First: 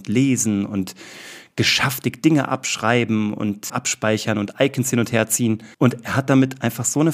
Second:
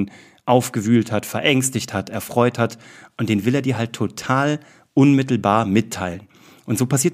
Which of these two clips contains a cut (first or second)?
first